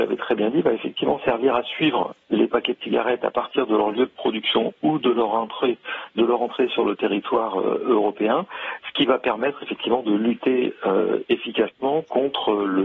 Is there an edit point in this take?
no; 0 cuts

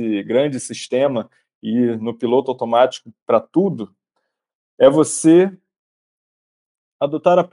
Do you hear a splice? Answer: no; 0 cuts

